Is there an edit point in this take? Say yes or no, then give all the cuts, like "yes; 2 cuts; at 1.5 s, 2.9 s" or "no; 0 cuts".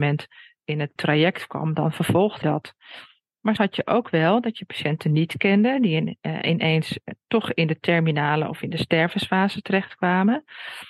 yes; 3 cuts; at 1.0 s, 2.4 s, 3.6 s